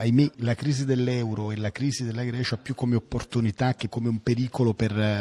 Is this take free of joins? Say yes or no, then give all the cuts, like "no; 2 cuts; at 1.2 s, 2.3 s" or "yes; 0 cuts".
yes; 0 cuts